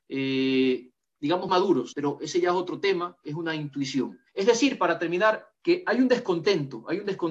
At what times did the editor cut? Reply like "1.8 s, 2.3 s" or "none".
1.5 s, 1.9 s, 4.3 s, 5.5 s